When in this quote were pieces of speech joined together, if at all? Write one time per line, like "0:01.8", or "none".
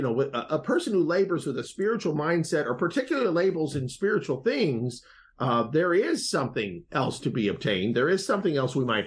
none